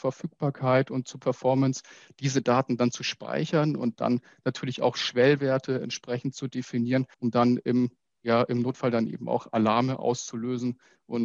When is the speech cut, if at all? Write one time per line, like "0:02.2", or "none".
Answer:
0:07.1